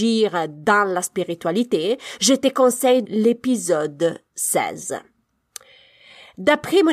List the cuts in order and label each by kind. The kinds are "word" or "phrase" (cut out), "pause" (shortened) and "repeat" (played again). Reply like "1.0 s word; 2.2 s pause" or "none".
3.1 s word

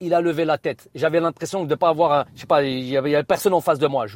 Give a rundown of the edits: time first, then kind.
2.3 s pause

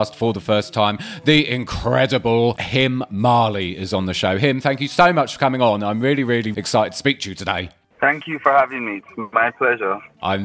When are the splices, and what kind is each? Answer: 6.5 s word

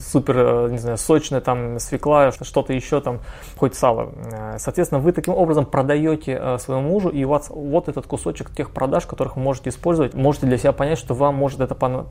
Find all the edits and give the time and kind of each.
2.4 s word; 10.1 s word

